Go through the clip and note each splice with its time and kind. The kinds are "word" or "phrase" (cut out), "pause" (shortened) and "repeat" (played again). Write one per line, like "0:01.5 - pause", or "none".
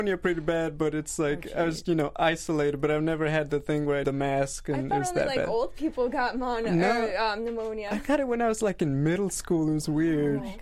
0:01.8 - word
0:04.0 - word

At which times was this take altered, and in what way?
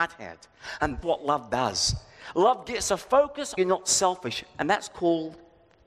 0:01.0 - word
0:03.6 - phrase

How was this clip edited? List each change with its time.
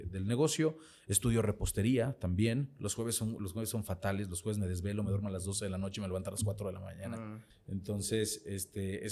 0:07.5 - pause

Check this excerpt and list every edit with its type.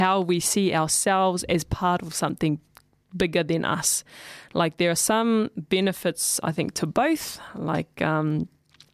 none

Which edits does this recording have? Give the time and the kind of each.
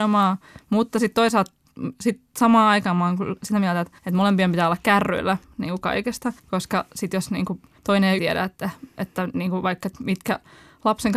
0:04.0 - pause
0:06.4 - pause
0:07.8 - pause
0:08.2 - word

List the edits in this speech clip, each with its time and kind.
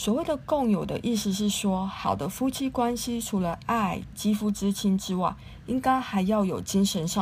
0:04.1 - phrase

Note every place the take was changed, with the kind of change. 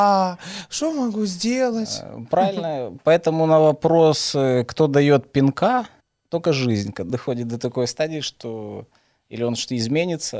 0:06.0 - pause
0:07.1 - word

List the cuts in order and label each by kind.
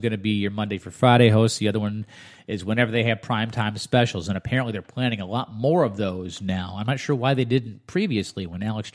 none

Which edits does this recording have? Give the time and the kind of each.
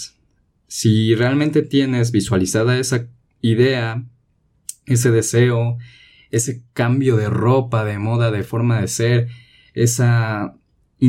none

